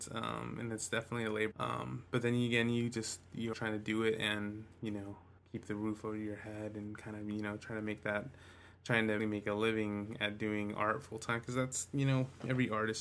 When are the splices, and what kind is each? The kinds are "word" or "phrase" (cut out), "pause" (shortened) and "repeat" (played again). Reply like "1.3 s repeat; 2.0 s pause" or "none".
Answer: 1.5 s phrase; 3.5 s word; 5.4 s pause; 9.2 s word

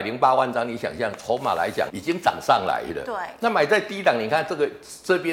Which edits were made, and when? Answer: 1.9 s word

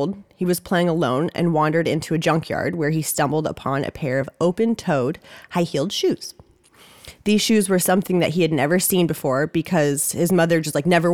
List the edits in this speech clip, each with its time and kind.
none

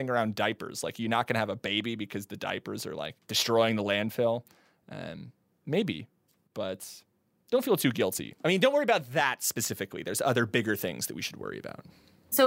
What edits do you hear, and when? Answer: none

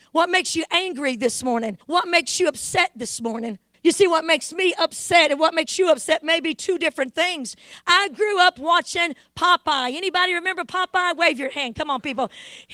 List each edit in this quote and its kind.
1.8 s pause; 3.7 s pause

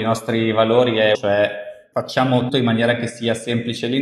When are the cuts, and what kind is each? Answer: 1.1 s phrase; 2.5 s word

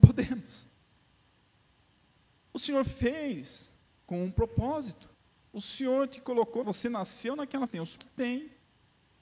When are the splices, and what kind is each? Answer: 6.6 s word; 7.7 s word; 8.0 s word

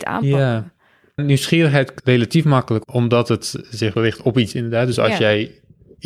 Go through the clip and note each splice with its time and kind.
1.2 s word; 2.0 s word; 2.8 s word; 4.0 s word; 4.5 s word

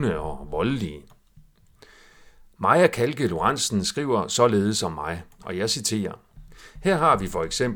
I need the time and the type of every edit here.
none

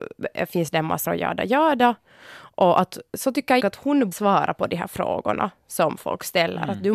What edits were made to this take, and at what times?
1.1 s word; 3.6 s word; 4.1 s word

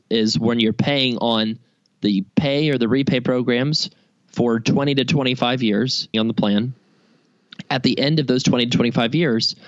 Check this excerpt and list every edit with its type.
2.3 s pause; 6.1 s word

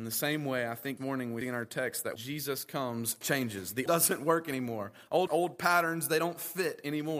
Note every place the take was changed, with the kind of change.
1.0 s word; 1.4 s word; 2.2 s word; 3.2 s word; 3.9 s word; 5.3 s word

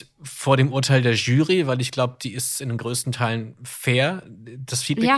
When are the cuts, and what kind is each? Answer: none

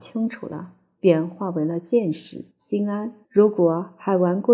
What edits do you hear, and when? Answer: 2.5 s pause; 3.2 s pause

